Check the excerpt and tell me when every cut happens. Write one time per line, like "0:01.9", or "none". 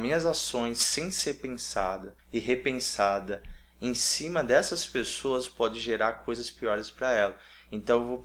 0:02.2